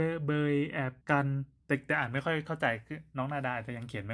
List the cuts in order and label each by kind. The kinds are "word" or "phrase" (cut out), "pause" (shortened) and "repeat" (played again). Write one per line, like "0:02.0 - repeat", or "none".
0:01.0 - pause
0:01.6 - pause